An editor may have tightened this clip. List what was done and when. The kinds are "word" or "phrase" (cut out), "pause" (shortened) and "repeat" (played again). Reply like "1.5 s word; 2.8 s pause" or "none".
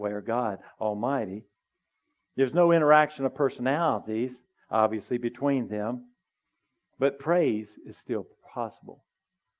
none